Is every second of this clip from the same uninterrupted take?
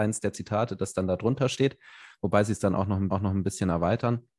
no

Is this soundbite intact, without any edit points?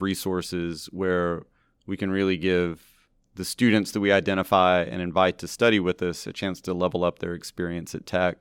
yes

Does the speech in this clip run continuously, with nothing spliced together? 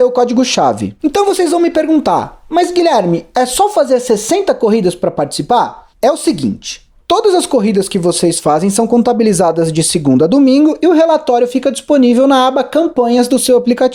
no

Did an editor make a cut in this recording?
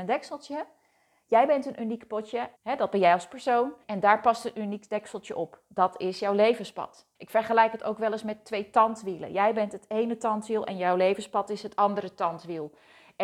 yes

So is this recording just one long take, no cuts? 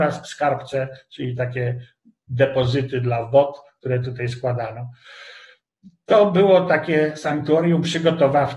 yes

